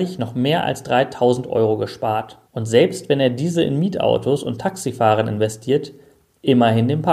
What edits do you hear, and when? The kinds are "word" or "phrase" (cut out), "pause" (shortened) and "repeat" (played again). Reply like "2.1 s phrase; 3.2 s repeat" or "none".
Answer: 2.5 s pause